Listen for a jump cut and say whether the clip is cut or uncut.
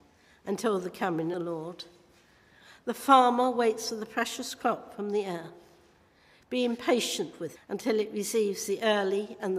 cut